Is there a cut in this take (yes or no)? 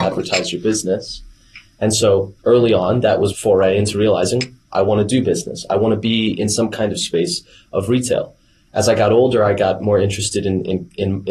yes